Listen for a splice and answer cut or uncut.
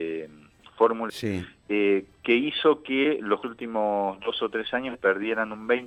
cut